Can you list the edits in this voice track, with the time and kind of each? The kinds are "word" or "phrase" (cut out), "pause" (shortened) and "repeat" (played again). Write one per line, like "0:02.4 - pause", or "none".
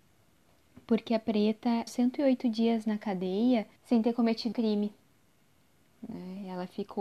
0:01.9 - phrase
0:03.8 - pause
0:04.5 - word